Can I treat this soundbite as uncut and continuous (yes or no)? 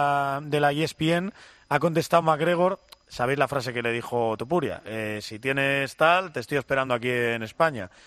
yes